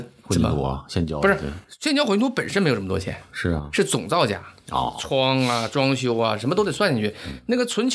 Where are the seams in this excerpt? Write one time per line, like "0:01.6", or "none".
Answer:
none